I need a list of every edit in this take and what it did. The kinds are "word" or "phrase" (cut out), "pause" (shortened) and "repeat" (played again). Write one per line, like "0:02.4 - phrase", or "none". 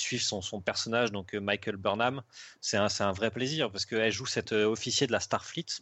none